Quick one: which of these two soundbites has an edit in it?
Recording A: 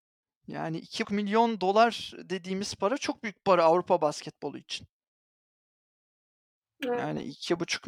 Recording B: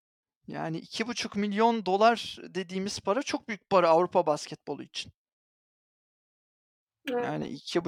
A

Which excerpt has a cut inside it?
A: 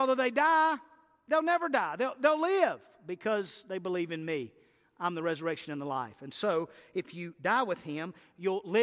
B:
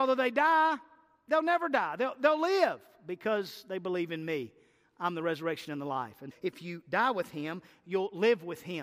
B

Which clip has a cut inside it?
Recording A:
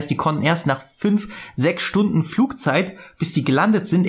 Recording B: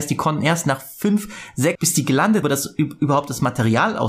B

